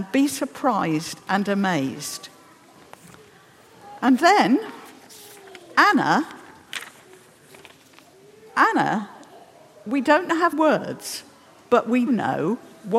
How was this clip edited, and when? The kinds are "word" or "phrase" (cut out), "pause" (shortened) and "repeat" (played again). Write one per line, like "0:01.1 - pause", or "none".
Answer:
0:10.5 - word
0:12.1 - word